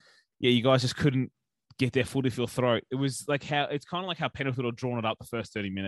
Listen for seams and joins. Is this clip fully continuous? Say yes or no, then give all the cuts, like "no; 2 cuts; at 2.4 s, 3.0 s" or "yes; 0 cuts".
yes; 0 cuts